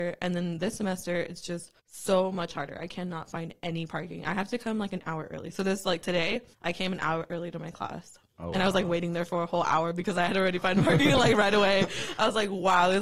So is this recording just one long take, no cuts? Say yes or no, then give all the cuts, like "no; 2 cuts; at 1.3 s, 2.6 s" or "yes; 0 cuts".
no; 2 cuts; at 1.8 s, 6.5 s